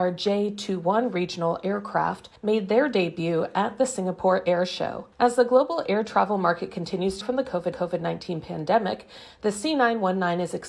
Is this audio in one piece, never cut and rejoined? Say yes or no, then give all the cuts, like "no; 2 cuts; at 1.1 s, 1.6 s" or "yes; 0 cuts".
no; 4 cuts; at 2.4 s, 5.1 s, 7.2 s, 7.7 s